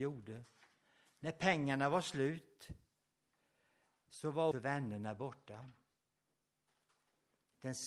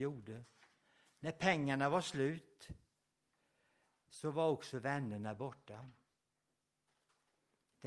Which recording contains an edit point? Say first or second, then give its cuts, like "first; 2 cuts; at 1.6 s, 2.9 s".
first; 1 cut; at 4.5 s